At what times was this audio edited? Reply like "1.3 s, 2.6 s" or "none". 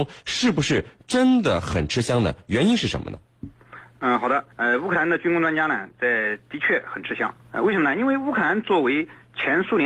4.5 s, 7.4 s